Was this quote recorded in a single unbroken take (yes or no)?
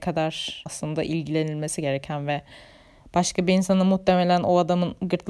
yes